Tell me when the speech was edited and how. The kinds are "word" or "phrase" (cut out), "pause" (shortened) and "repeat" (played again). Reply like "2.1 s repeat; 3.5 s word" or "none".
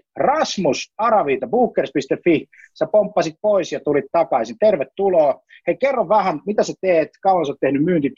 none